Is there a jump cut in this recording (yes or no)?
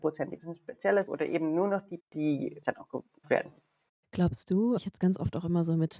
yes